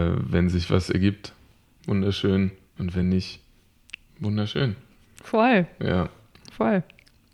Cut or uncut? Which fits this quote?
uncut